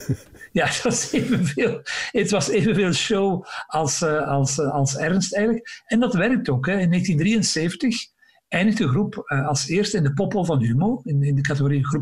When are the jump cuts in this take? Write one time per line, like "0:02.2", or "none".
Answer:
none